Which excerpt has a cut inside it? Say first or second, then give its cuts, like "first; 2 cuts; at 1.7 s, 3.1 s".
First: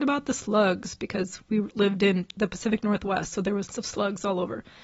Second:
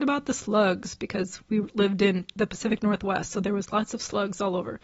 first; 1 cut; at 3.7 s